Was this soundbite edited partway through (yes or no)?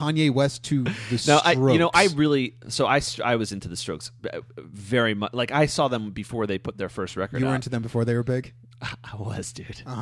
no